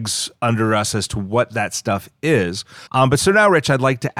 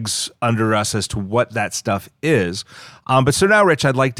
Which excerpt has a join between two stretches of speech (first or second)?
first